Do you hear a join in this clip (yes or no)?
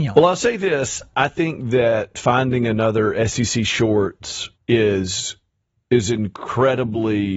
yes